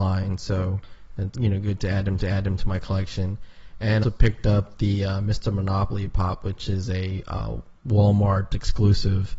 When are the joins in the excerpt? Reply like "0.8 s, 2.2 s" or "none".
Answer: 1.3 s, 2.2 s, 4.0 s, 7.8 s